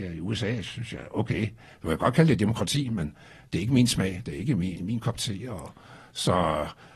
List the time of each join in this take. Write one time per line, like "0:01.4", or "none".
0:04.8